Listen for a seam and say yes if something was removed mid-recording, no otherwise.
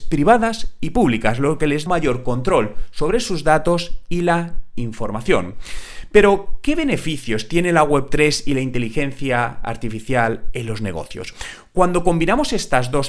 yes